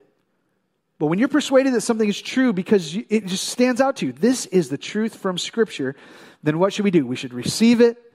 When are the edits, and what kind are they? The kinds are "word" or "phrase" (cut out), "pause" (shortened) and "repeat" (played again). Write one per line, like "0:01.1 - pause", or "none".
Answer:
none